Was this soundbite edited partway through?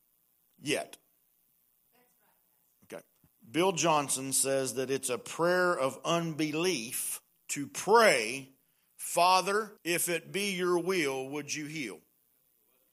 yes; 3 cuts; at 3.2 s, 7.3 s, 9.8 s

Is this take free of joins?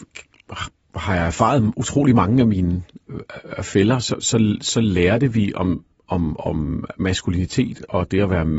yes; 0 cuts

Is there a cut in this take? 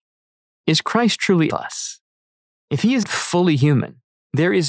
yes; 2 cuts; at 1.5 s, 3.0 s

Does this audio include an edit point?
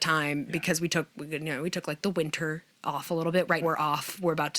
yes; 1 cut; at 3.6 s

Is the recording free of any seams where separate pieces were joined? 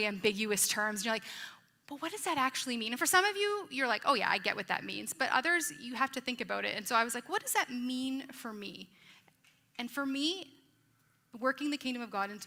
yes; 0 cuts

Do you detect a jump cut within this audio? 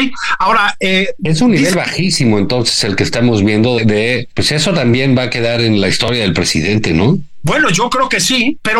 yes; 2 cuts; at 3.8 s, 5.8 s

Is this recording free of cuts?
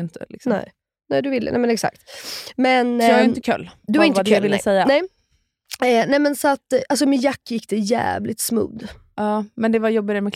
yes; 0 cuts

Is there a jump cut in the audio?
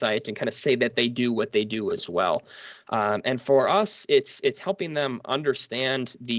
no; 0 cuts

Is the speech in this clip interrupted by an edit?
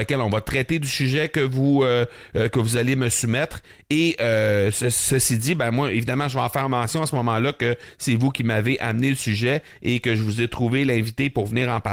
no; 0 cuts

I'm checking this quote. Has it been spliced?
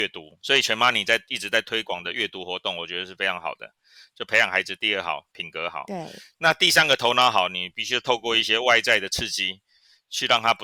no; 0 cuts

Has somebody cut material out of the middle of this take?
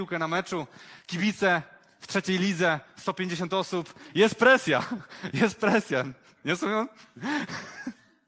no; 0 cuts

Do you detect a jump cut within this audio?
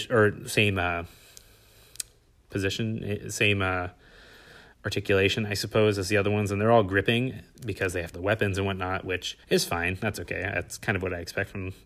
yes; 2 cuts; at 8.1 s, 9.4 s

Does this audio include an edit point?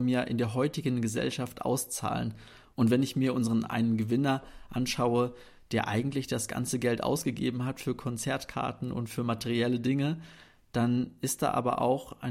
no; 0 cuts

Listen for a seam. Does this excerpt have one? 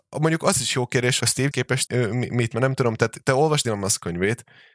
yes; 5 cuts; at 1.2 s, 1.5 s, 1.9 s, 2.5 s, 3.6 s

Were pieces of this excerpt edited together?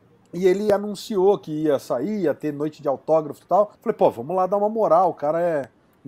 yes; 1 cut; at 3.7 s

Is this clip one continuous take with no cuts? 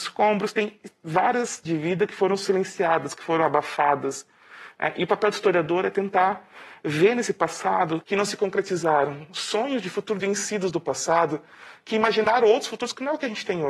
no; 3 cuts; at 1.6 s, 8.0 s, 10.2 s

